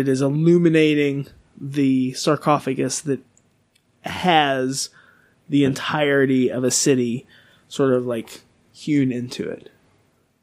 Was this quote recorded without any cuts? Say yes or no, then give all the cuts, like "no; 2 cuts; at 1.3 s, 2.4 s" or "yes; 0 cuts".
yes; 0 cuts